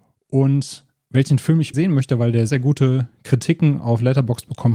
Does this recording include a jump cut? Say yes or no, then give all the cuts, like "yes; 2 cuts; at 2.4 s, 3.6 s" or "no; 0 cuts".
yes; 2 cuts; at 1.7 s, 2.5 s